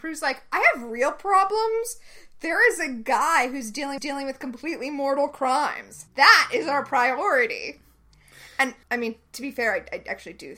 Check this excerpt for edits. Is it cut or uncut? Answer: cut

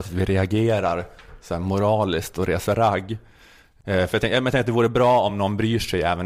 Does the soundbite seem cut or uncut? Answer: uncut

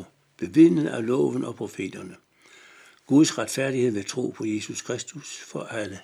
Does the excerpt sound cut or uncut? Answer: uncut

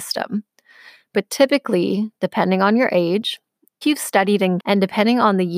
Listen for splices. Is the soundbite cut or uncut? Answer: cut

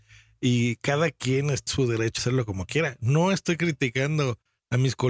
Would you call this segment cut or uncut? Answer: cut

